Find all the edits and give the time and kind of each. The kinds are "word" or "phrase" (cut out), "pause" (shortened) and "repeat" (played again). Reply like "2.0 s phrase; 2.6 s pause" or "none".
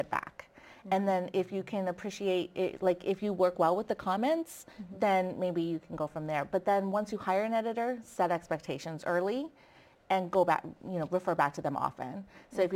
none